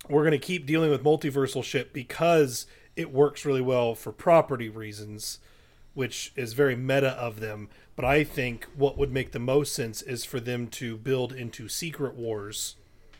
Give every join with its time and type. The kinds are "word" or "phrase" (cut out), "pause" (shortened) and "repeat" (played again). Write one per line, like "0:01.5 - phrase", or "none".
none